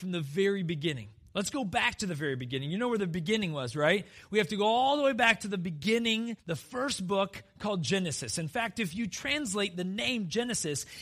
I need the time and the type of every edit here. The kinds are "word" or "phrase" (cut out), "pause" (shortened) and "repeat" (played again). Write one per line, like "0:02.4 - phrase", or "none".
0:06.4 - pause